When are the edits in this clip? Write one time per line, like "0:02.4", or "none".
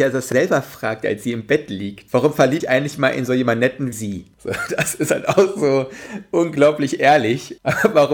0:02.6
0:03.9